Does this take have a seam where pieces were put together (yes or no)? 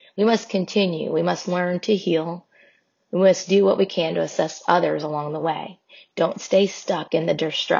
no